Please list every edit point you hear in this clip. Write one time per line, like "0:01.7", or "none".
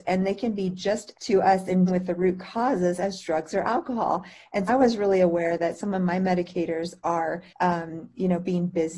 0:01.1
0:01.9
0:04.7
0:07.5